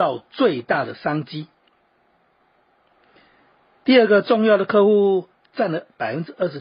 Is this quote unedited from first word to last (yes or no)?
yes